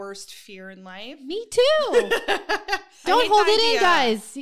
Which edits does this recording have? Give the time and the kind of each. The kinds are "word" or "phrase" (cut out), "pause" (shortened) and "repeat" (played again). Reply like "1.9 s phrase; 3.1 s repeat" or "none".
3.0 s word